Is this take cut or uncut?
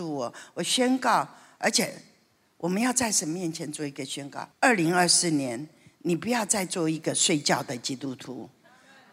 cut